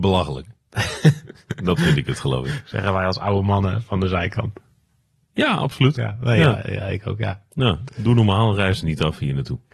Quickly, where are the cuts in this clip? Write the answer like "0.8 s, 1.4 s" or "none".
none